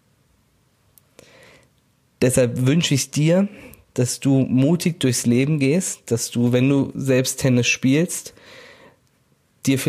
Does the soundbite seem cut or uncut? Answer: uncut